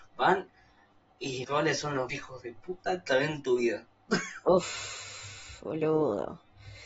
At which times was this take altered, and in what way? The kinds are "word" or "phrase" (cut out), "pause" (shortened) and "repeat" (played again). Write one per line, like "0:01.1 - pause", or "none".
0:01.4 - word
0:02.1 - word
0:03.1 - word